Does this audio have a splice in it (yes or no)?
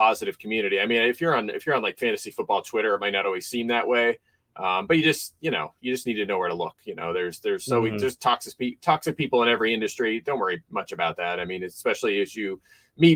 no